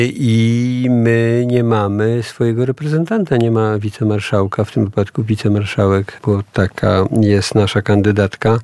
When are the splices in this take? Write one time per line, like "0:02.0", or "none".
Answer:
0:06.2